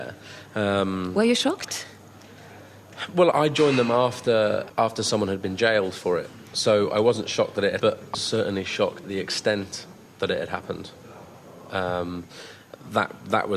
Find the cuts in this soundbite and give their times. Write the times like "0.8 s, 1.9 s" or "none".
3.3 s, 4.7 s, 7.8 s, 8.1 s, 9.0 s